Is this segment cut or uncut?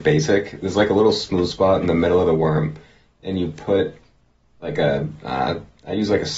uncut